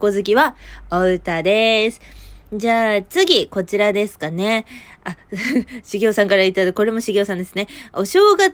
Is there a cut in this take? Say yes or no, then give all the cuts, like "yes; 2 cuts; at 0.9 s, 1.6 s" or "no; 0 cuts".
no; 0 cuts